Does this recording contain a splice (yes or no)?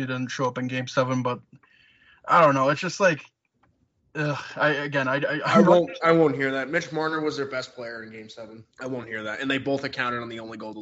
yes